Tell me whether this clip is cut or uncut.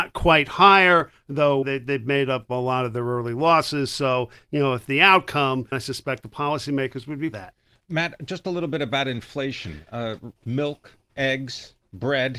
cut